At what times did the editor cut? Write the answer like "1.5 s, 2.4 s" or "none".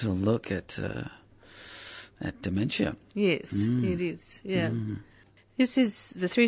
none